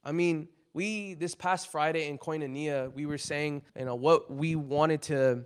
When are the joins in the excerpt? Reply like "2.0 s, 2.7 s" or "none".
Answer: 3.7 s